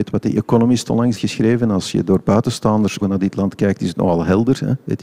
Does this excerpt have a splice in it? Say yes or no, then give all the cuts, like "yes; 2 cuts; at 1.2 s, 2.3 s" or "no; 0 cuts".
yes; 2 cuts; at 1.1 s, 3.0 s